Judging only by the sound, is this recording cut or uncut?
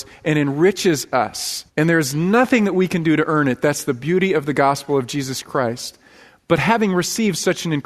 cut